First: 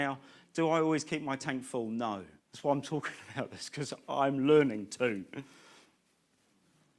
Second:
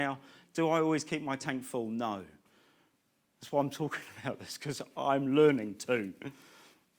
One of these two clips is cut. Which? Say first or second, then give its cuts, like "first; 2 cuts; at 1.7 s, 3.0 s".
first; 1 cut; at 2.4 s